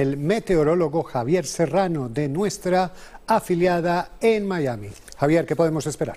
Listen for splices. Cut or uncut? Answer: uncut